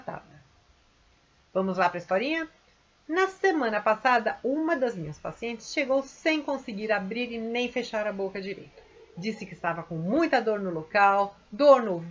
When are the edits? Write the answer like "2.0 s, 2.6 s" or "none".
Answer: none